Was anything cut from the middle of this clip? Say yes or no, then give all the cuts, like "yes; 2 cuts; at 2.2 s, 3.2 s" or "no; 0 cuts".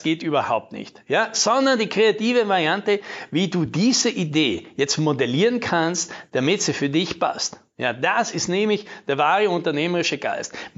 no; 0 cuts